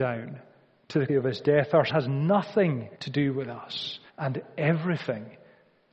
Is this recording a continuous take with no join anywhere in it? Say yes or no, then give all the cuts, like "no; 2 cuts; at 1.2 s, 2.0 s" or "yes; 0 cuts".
no; 4 cuts; at 1.1 s, 1.9 s, 2.9 s, 4.1 s